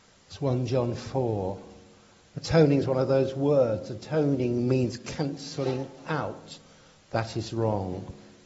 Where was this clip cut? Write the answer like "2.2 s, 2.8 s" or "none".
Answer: none